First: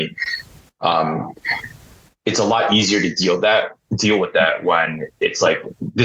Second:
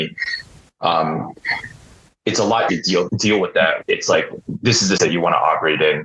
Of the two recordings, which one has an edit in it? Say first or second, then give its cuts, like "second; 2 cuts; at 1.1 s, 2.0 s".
second; 4 cuts; at 2.7 s, 3.1 s, 3.8 s, 5.0 s